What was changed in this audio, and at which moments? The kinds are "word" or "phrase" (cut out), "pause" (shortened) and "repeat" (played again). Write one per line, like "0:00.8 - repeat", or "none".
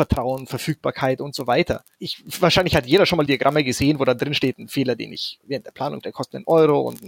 0:03.3 - word
0:05.4 - word
0:06.0 - word